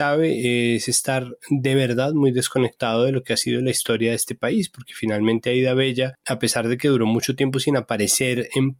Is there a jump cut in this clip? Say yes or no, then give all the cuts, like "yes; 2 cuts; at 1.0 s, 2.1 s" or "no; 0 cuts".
no; 0 cuts